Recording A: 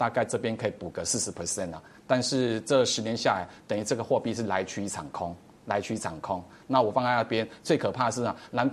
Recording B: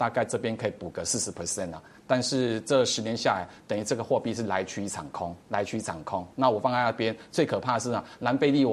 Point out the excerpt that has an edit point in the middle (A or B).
B